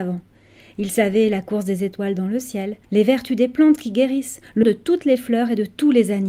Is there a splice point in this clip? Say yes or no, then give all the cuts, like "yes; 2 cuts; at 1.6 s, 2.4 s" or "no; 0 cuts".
yes; 2 cuts; at 2.8 s, 4.6 s